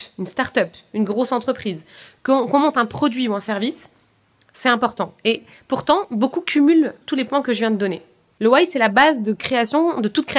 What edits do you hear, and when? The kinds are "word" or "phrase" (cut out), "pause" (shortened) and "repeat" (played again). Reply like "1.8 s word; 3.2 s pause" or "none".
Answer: none